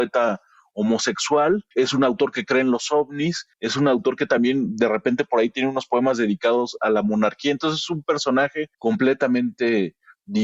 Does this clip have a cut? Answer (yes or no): yes